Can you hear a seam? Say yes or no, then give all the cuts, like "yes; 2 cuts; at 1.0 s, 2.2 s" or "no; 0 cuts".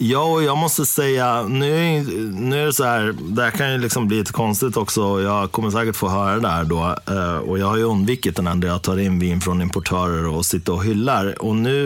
yes; 1 cut; at 8.5 s